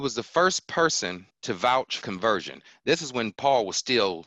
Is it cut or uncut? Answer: cut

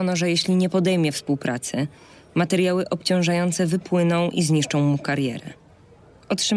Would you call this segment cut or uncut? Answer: uncut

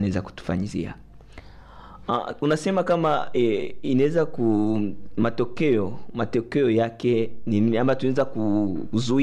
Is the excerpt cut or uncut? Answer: uncut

